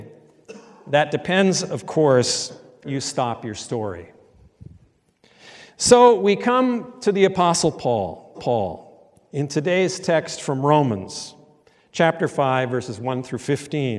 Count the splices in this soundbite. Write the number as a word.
two